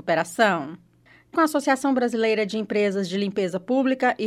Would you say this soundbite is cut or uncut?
cut